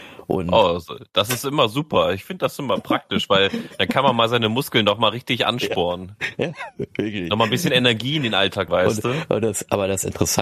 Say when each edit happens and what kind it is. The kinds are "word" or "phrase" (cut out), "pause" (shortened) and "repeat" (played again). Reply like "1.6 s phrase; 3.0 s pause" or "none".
8.7 s word